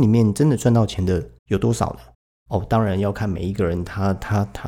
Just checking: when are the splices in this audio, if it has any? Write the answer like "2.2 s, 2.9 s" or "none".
1.4 s, 2.1 s